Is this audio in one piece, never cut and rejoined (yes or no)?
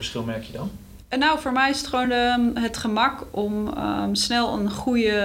yes